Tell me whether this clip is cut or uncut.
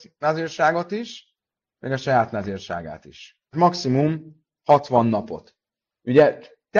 cut